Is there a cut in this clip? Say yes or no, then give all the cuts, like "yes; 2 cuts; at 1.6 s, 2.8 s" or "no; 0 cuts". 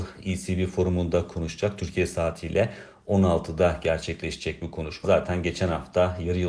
yes; 1 cut; at 5.0 s